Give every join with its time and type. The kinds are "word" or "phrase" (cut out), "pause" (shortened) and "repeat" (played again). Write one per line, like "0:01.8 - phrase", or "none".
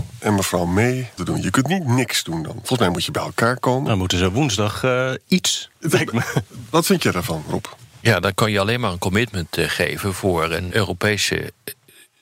0:01.2 - phrase
0:10.7 - word